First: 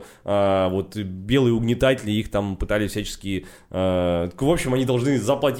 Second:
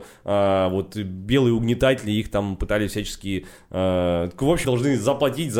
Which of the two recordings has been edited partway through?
second; 1 cut; at 4.6 s

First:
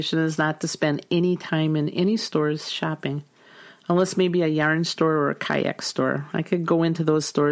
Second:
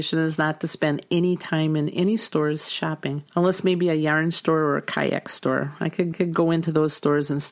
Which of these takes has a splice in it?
second; 2 cuts; at 3.3 s, 6.1 s

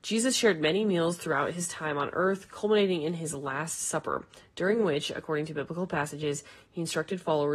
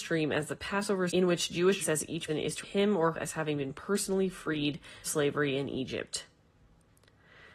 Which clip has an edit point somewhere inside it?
second; 6 cuts; at 1.1 s, 1.8 s, 2.3 s, 2.6 s, 3.1 s, 5.0 s

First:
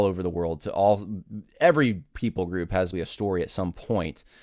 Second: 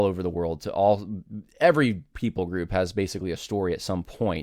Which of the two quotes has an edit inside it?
first; 1 cut; at 2.9 s

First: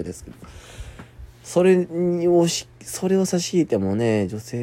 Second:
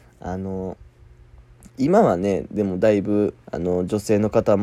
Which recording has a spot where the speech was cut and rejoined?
second; 1 cut; at 3.4 s

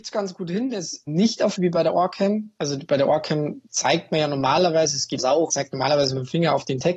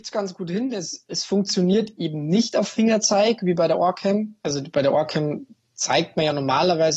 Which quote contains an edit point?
first; 5 cuts; at 1.1 s, 1.5 s, 3.7 s, 5.2 s, 5.5 s

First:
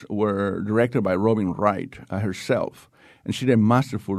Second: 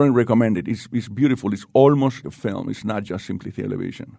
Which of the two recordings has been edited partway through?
second; 1 cut; at 2.2 s

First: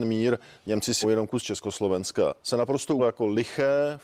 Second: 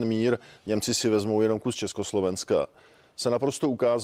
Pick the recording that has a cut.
first; 3 cuts; at 1.0 s, 2.4 s, 3.0 s

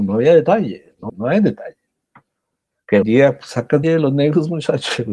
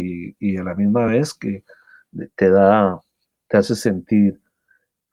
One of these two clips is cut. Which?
first; 3 cuts; at 1.1 s, 3.0 s, 3.8 s

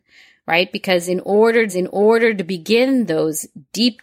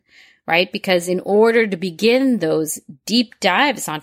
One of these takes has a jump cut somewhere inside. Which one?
first; 1 cut; at 1.7 s

